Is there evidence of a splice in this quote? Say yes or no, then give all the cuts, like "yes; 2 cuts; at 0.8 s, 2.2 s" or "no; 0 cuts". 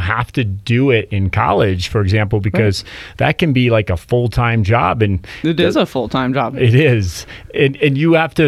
no; 0 cuts